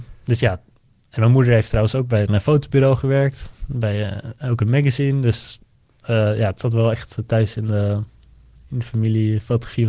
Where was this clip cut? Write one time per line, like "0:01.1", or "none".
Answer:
none